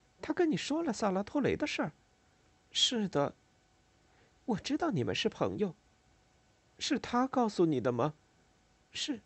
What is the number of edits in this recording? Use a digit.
0